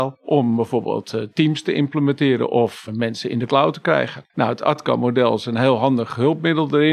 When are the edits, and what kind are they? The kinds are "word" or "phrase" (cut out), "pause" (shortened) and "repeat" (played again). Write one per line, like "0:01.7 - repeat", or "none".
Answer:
0:04.3 - pause